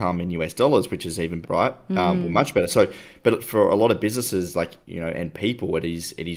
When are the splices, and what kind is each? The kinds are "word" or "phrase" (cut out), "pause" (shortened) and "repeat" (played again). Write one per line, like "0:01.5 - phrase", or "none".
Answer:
0:01.4 - word
0:04.8 - pause